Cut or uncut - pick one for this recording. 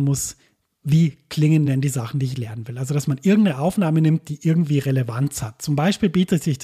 uncut